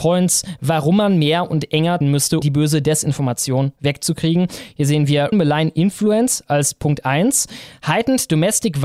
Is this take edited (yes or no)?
yes